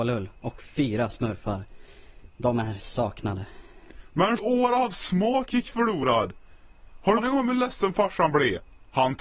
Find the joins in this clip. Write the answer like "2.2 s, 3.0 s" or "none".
4.4 s, 7.2 s